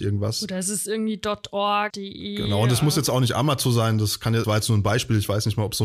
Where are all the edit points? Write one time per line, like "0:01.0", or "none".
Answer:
0:01.9
0:04.4

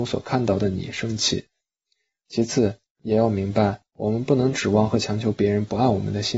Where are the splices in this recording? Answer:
none

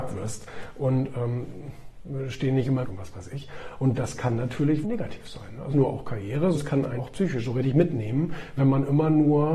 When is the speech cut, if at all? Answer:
0:02.8
0:04.8
0:05.7
0:06.5
0:07.0

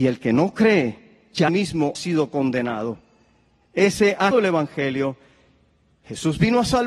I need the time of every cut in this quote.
0:01.5
0:02.0
0:04.3

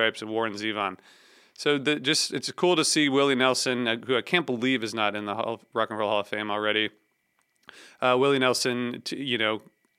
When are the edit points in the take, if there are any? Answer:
none

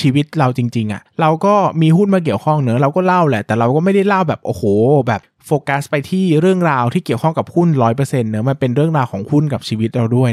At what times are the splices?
none

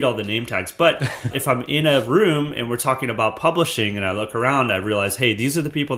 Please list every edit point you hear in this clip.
none

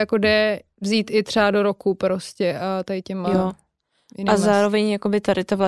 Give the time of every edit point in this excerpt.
none

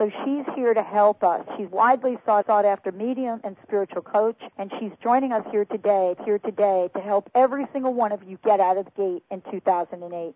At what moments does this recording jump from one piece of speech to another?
0:01.7
0:02.4
0:04.5
0:06.2

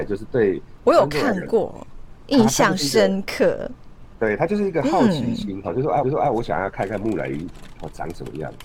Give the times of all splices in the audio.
0:06.0

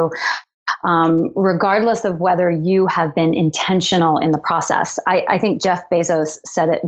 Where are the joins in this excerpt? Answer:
none

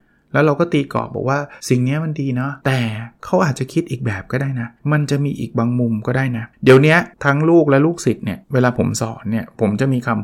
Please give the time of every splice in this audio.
0:01.6
0:02.6
0:04.8
0:06.5
0:07.1
0:08.4

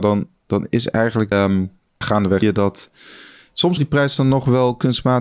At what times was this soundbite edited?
0:01.3
0:02.0
0:02.4
0:03.8

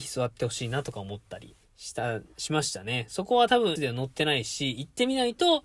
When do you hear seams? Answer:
0:01.6
0:03.8

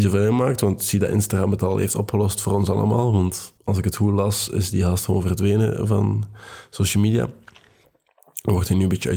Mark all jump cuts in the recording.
0:03.6

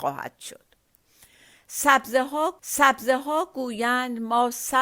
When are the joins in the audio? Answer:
0:02.6

